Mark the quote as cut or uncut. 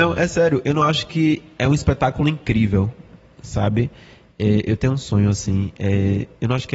uncut